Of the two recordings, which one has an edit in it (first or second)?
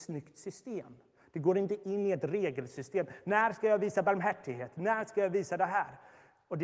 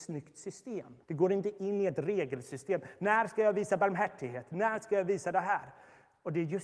second